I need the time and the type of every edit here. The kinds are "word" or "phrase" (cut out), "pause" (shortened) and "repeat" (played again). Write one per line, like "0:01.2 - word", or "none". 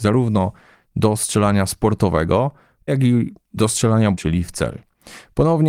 0:02.9 - word
0:04.1 - word